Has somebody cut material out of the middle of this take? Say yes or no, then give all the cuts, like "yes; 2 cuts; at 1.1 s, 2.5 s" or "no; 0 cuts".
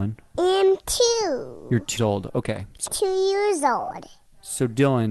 yes; 2 cuts; at 2.0 s, 2.9 s